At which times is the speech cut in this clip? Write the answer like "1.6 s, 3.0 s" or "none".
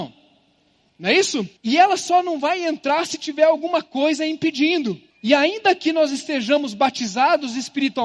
1.6 s, 5.1 s